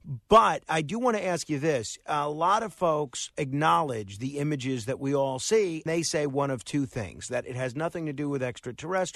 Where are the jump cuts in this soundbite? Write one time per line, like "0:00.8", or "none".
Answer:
0:05.9